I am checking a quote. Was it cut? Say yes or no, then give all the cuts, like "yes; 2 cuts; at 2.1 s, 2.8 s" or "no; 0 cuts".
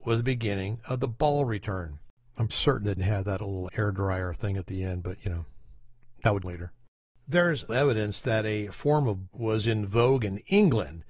yes; 6 cuts; at 2.5 s, 3.0 s, 3.7 s, 6.4 s, 7.7 s, 9.3 s